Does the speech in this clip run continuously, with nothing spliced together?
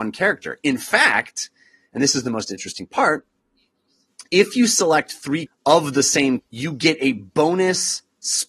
no; 3 cuts; at 4.3 s, 5.5 s, 6.4 s

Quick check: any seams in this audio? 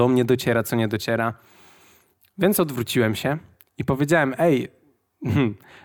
no; 0 cuts

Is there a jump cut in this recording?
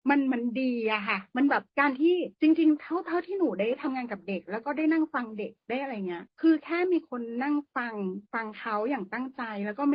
yes; 4 cuts; at 1.7 s, 2.3 s, 6.3 s, 8.3 s

